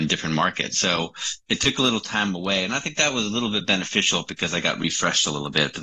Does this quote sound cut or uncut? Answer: uncut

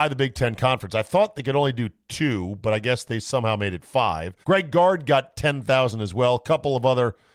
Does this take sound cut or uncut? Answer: cut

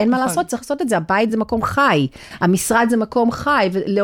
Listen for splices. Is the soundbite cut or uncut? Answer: uncut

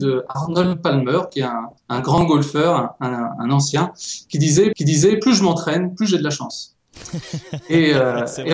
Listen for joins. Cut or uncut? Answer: cut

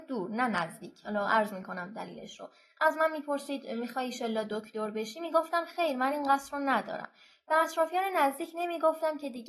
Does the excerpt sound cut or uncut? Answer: uncut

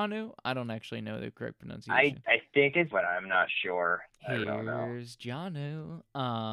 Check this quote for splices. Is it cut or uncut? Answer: cut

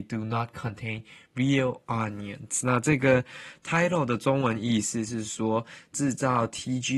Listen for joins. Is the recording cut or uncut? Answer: uncut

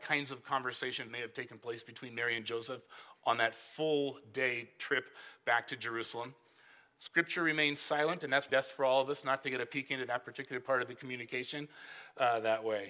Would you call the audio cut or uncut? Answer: cut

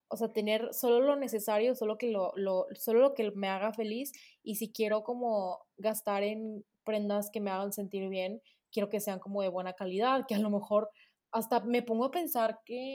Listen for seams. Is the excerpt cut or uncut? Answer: uncut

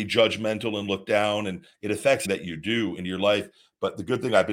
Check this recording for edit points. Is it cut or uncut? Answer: cut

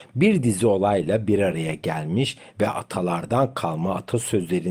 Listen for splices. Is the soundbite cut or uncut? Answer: uncut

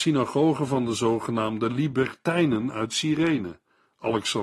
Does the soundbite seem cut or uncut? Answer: uncut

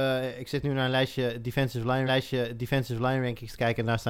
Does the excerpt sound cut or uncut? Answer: cut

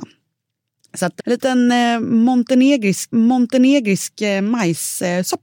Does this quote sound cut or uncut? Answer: cut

